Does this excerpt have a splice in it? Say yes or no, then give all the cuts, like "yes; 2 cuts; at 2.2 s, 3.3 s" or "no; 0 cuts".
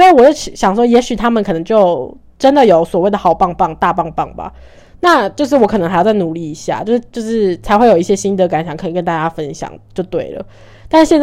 yes; 1 cut; at 7.1 s